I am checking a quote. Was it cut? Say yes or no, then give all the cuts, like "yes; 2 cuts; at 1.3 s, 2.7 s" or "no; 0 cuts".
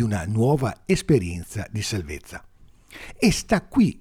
no; 0 cuts